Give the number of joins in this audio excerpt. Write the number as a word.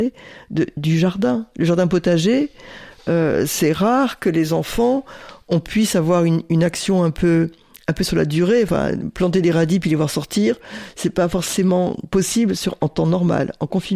zero